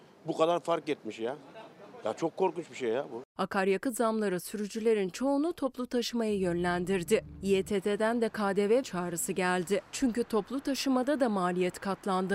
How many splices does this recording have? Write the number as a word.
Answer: one